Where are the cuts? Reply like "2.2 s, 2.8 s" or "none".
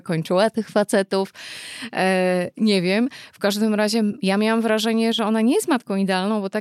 none